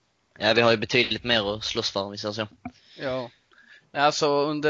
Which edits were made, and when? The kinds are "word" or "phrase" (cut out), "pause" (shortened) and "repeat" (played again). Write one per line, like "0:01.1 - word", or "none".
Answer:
none